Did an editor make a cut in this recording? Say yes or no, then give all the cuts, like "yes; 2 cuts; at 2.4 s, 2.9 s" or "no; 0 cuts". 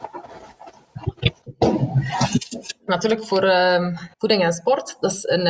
yes; 2 cuts; at 2.9 s, 4.1 s